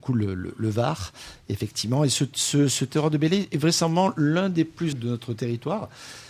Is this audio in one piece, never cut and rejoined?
no; 1 cut; at 4.9 s

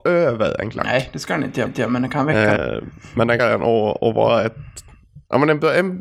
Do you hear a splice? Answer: yes; 3 cuts; at 1.7 s, 2.6 s, 3.4 s

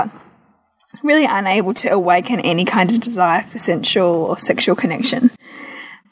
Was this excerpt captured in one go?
yes; 0 cuts

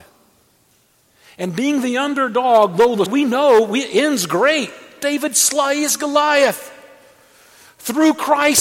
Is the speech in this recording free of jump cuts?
no; 1 cut; at 3.1 s

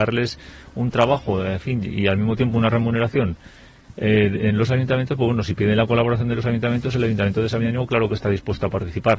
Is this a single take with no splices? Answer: yes; 0 cuts

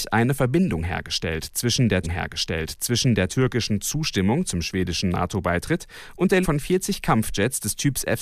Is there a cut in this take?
yes; 2 cuts; at 2.0 s, 6.4 s

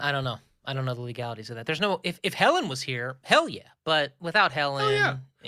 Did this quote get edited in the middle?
no; 0 cuts

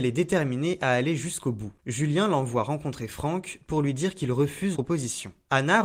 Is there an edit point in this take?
yes; 1 cut; at 4.7 s

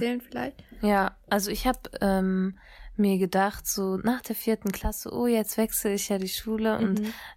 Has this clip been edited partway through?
no; 0 cuts

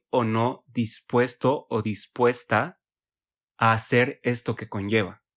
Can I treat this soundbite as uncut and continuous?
yes; 0 cuts

